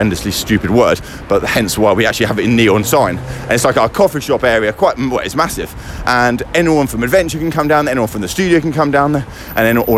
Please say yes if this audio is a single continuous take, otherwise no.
yes